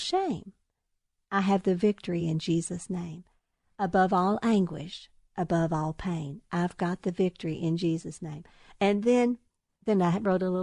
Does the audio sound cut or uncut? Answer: uncut